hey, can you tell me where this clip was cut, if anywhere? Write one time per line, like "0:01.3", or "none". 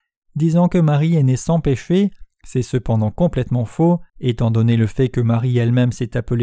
0:02.3
0:04.1